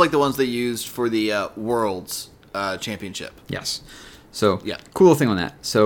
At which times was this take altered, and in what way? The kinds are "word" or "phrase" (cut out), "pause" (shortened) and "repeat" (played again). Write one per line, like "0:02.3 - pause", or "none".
none